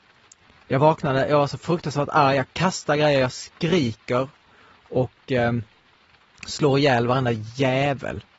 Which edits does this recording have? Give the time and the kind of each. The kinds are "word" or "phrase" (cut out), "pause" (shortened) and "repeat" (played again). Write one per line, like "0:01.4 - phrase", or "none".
none